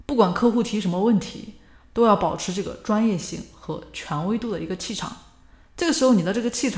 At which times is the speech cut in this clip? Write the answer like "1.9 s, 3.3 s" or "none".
none